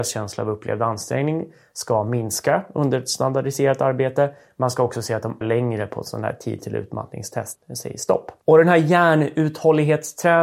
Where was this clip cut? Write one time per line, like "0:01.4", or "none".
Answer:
0:05.4
0:07.5

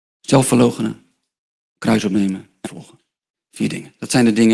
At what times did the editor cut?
0:02.6

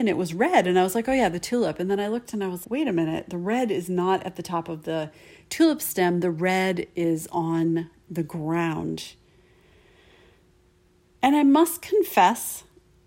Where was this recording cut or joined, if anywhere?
0:02.6

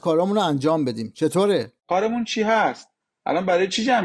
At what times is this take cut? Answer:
none

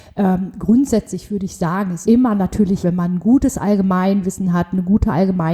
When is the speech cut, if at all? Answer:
0:02.0
0:02.8

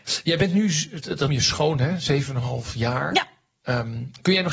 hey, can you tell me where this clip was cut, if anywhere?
0:01.3

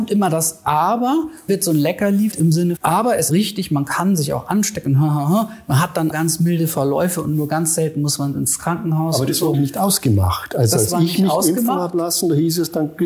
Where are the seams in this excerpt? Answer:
0:01.5
0:02.3
0:02.8
0:03.3
0:06.1
0:09.5

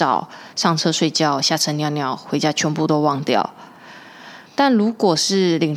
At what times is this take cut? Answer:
0:04.4

